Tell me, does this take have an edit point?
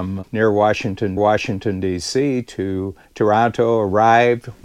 yes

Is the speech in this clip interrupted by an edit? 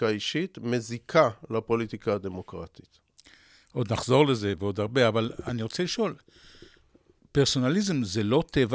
no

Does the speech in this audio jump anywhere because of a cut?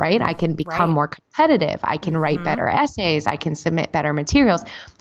no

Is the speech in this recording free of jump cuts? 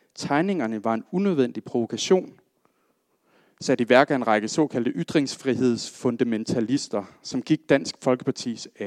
yes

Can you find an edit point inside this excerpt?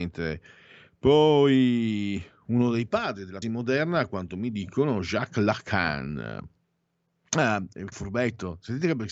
yes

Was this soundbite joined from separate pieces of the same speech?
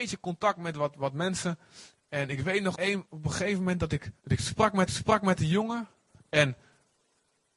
yes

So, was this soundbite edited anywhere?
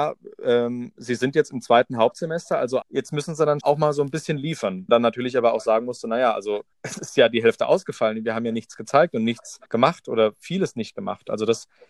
yes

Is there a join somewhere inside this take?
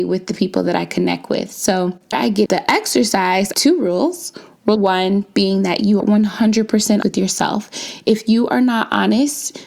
yes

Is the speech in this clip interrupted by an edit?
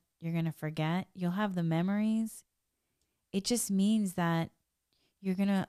no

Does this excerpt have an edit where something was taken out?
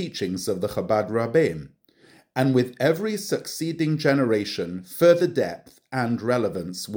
no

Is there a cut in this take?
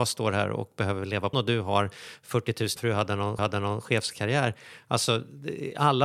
yes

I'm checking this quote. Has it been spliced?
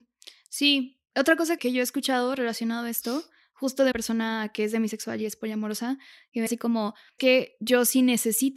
yes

